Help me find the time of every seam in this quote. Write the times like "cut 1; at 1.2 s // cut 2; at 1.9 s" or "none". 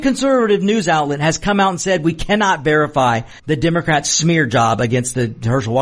cut 1; at 3.4 s